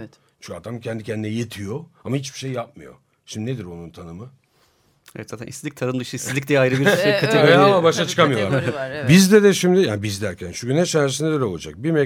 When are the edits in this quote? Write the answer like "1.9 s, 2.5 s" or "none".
none